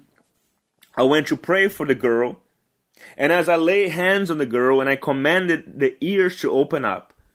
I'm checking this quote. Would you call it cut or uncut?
uncut